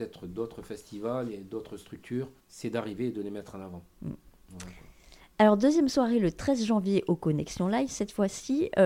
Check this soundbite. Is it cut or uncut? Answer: cut